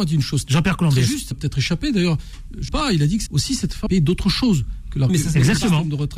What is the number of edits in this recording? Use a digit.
5